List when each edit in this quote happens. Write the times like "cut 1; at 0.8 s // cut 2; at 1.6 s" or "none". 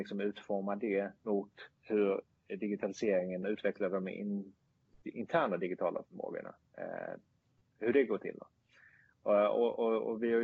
cut 1; at 1.2 s // cut 2; at 3.4 s